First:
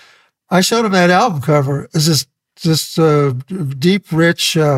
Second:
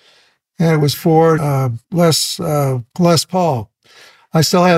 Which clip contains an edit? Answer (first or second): second